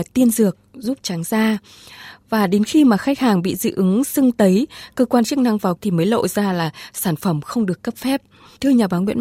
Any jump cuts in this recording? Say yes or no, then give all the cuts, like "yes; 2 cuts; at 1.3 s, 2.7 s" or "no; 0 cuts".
yes; 1 cut; at 5.8 s